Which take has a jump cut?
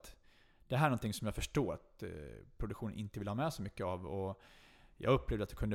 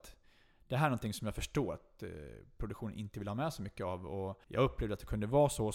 second; 1 cut; at 4.4 s

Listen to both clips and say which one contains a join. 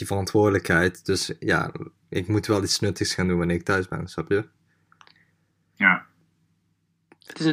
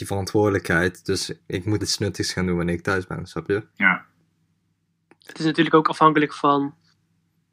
second; 3 cuts; at 1.4 s, 1.8 s, 3.7 s

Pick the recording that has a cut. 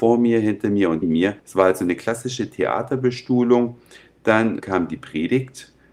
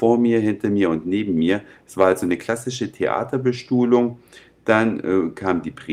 first; 3 cuts; at 1.0 s, 1.4 s, 4.6 s

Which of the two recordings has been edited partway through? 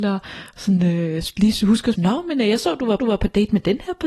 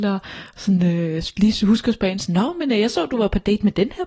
first; 2 cuts; at 2.0 s, 3.0 s

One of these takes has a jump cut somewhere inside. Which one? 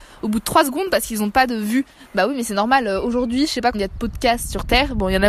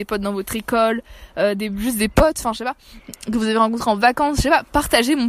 first; 1 cut; at 3.7 s

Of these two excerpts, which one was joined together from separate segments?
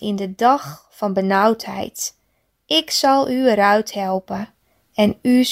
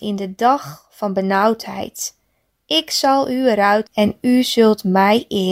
second; 1 cut; at 3.9 s

